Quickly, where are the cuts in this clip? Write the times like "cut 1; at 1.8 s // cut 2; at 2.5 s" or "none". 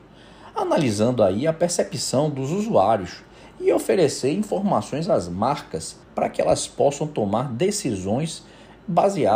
cut 1; at 6.0 s